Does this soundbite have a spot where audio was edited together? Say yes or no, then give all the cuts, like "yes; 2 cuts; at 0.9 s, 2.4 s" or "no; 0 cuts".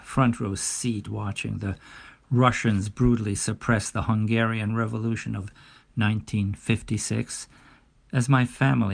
no; 0 cuts